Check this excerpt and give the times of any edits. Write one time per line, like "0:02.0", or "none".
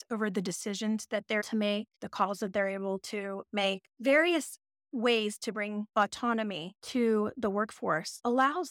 0:01.4